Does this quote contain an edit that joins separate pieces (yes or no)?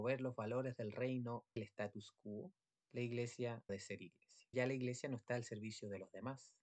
yes